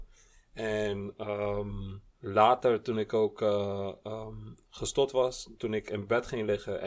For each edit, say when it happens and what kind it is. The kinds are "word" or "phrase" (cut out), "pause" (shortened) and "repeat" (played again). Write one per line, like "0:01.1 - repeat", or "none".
0:02.1 - pause